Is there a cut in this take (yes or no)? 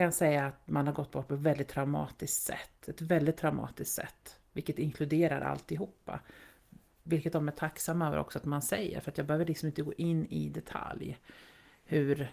no